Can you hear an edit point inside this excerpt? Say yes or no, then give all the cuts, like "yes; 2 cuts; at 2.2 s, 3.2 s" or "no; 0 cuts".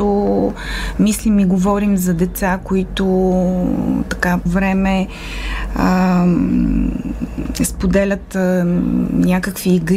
yes; 1 cut; at 4.5 s